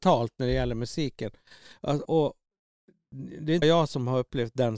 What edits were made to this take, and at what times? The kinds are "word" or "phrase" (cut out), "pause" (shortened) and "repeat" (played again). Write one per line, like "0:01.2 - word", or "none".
0:02.1 - word
0:03.6 - word